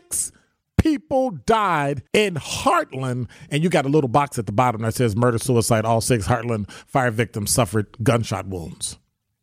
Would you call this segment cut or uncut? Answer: cut